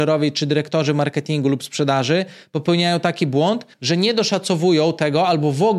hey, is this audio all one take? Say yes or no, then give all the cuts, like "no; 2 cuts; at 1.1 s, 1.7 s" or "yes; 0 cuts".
no; 1 cut; at 3.7 s